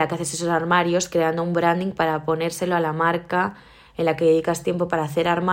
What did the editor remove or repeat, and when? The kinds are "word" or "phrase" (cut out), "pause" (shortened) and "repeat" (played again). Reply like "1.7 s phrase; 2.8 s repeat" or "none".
none